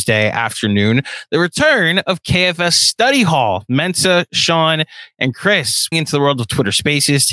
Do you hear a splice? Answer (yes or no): yes